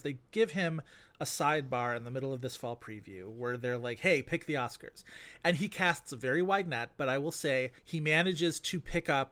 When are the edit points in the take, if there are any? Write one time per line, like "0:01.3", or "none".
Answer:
0:07.8